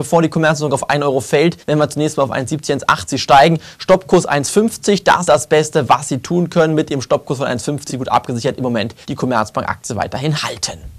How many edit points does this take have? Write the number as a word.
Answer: four